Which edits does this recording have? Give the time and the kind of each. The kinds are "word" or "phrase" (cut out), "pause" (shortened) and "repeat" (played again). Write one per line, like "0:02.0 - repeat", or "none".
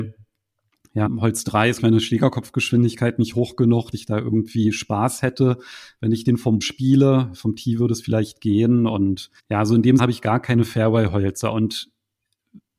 0:01.1 - word
0:01.8 - word
0:03.9 - word
0:06.6 - word
0:09.4 - pause
0:10.0 - word